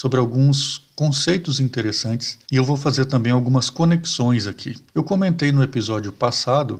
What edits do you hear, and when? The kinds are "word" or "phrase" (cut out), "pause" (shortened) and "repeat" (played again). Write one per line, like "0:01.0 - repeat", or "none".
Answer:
0:02.4 - pause
0:04.9 - pause